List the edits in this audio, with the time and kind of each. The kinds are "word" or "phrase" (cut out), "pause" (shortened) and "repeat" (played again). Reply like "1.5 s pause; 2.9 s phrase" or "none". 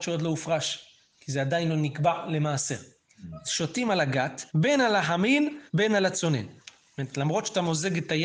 4.5 s pause; 5.7 s pause